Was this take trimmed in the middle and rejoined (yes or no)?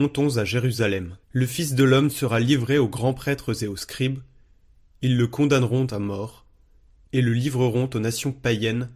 yes